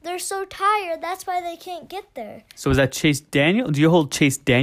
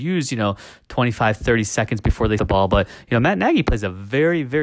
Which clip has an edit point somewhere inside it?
second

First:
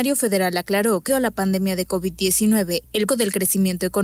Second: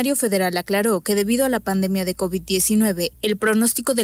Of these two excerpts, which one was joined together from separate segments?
first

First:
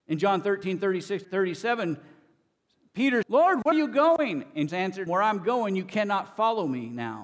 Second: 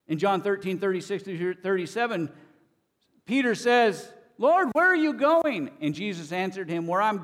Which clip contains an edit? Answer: first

